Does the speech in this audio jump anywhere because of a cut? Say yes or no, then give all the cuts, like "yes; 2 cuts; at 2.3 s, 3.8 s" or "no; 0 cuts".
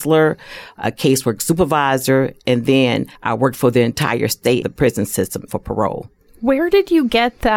yes; 3 cuts; at 3.1 s, 4.6 s, 5.5 s